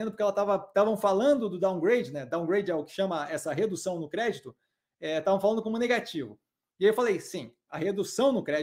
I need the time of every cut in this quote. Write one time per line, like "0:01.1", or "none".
none